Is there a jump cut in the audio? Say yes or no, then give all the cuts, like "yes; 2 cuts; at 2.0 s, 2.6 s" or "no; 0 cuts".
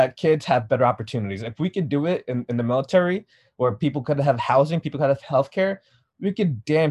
no; 0 cuts